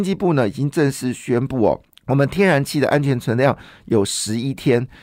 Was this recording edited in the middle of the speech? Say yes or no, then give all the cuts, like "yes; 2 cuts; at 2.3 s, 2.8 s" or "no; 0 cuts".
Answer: yes; 1 cut; at 1.9 s